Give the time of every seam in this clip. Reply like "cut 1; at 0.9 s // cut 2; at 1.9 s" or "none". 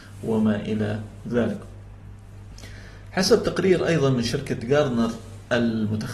none